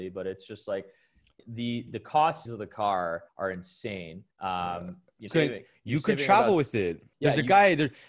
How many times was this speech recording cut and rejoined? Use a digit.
7